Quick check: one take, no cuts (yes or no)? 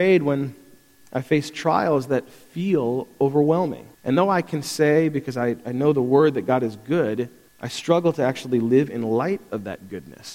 no